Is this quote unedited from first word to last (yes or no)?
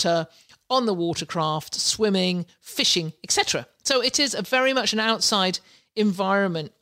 yes